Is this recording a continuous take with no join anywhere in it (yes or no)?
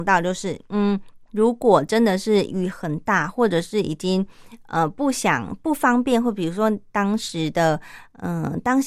no